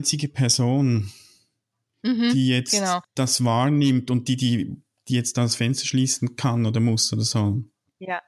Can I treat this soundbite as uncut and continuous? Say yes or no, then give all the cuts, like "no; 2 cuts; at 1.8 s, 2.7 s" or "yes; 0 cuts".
yes; 0 cuts